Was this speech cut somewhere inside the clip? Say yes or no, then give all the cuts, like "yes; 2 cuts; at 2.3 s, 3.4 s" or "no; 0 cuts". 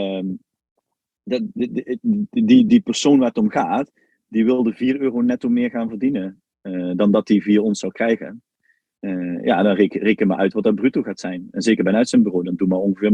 yes; 1 cut; at 2.7 s